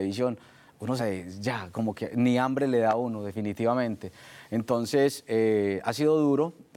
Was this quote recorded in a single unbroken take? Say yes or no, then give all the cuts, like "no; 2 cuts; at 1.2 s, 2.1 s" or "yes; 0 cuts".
no; 1 cut; at 1.0 s